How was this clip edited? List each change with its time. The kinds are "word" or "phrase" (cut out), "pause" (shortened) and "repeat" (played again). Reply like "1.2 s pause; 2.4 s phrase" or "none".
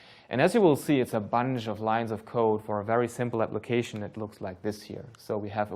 4.1 s word